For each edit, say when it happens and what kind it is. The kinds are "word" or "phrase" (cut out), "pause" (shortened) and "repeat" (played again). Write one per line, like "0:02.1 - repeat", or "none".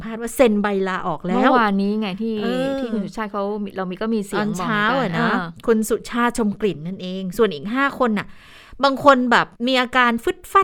0:09.6 - pause